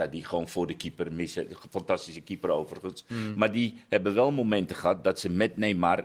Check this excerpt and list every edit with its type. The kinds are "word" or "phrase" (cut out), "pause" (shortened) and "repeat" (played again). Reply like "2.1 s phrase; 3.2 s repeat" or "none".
none